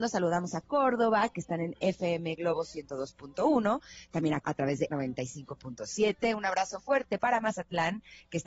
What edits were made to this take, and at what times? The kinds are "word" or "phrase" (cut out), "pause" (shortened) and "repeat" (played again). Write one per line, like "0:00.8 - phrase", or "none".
0:04.4 - word
0:04.9 - word
0:06.8 - word